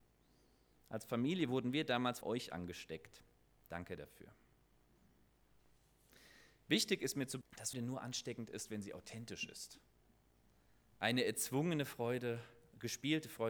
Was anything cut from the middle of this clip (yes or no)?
yes